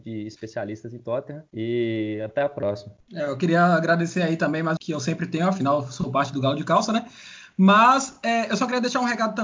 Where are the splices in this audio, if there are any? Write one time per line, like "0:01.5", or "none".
0:04.8